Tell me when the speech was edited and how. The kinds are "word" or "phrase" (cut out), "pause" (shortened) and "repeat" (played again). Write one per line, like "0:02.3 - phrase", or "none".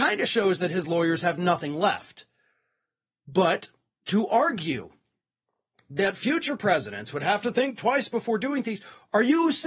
none